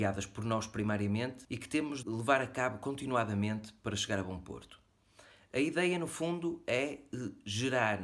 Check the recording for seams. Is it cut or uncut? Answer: cut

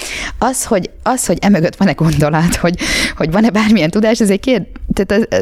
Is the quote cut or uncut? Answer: uncut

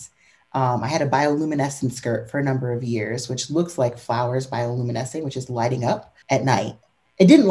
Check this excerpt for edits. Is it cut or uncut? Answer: cut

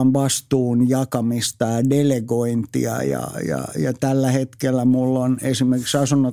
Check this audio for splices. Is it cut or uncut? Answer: uncut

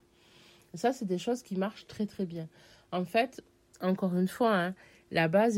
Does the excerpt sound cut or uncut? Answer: uncut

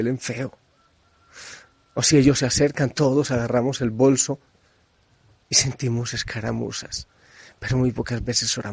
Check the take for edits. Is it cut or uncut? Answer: uncut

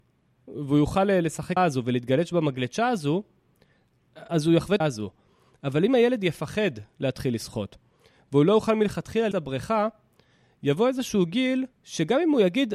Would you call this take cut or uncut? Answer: cut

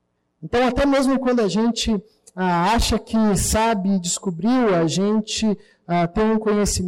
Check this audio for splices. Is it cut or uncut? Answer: uncut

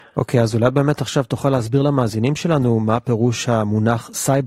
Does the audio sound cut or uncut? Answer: uncut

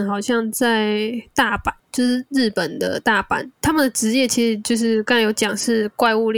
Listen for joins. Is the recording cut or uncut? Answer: cut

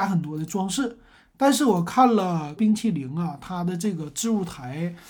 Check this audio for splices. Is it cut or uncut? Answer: cut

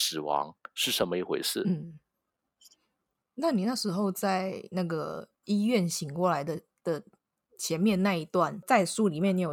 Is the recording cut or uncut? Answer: uncut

